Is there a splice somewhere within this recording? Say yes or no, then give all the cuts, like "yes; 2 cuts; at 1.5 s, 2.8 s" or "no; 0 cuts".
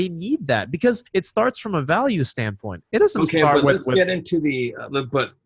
yes; 1 cut; at 1.1 s